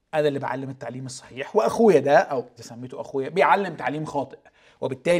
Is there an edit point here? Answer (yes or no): yes